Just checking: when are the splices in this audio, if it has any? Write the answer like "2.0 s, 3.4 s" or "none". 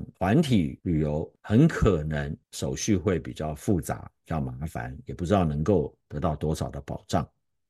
1.4 s, 2.4 s, 6.0 s